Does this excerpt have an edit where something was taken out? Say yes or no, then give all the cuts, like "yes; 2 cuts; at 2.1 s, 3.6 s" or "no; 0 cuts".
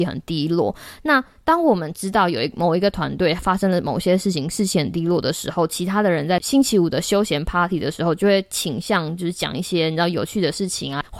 no; 0 cuts